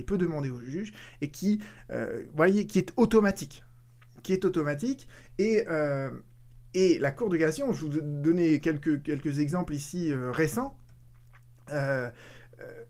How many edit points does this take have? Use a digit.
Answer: 0